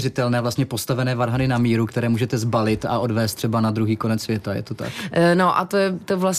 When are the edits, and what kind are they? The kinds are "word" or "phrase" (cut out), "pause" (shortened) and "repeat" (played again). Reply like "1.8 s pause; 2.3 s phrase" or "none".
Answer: none